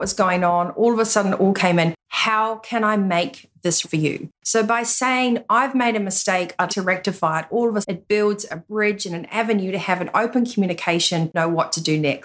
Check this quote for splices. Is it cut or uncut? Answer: cut